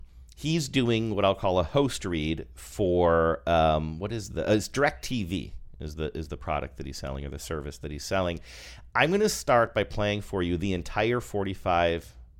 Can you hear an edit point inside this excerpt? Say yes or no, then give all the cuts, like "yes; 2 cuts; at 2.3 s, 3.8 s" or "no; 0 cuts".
no; 0 cuts